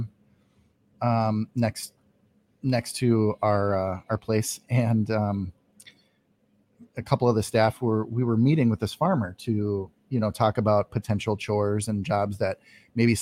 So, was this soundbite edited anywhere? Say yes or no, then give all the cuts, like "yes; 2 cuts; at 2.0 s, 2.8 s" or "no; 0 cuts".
no; 0 cuts